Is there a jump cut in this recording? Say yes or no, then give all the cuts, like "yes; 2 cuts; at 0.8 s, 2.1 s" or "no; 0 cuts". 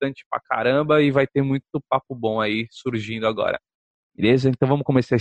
no; 0 cuts